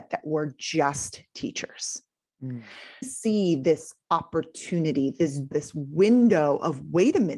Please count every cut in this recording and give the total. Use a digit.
2